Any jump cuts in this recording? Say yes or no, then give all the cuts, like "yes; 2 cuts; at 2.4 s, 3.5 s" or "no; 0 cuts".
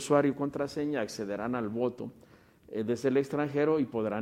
no; 0 cuts